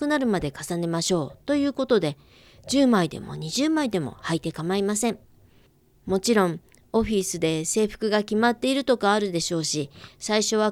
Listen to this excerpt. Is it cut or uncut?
uncut